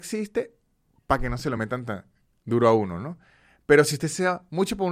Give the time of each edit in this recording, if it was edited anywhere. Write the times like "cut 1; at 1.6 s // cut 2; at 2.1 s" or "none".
none